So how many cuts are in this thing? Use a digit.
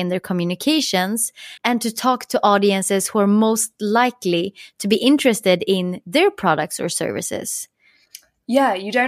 1